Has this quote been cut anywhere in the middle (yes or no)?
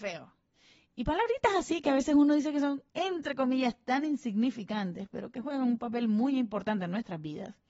yes